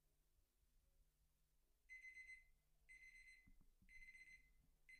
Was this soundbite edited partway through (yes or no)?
no